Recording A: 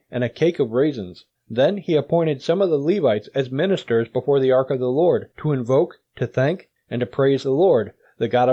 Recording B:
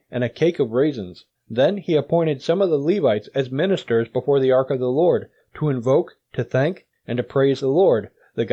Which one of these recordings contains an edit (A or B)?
A